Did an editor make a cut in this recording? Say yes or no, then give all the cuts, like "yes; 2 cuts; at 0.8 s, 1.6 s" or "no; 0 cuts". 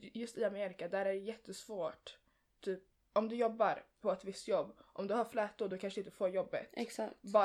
yes; 1 cut; at 2.9 s